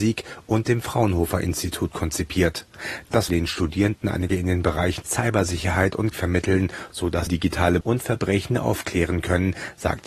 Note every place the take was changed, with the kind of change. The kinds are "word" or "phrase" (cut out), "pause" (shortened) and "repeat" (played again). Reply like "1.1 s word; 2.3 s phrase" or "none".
3.3 s phrase; 4.3 s word; 5.0 s word; 6.1 s word; 7.3 s word; 7.8 s phrase